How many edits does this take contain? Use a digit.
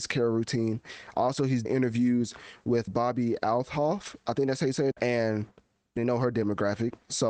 4